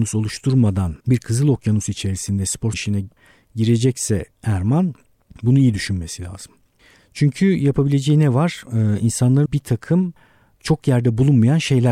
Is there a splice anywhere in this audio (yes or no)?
yes